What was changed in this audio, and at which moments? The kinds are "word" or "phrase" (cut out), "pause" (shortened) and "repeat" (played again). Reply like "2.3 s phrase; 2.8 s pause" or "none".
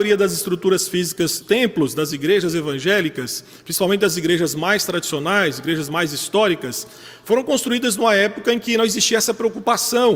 1.4 s word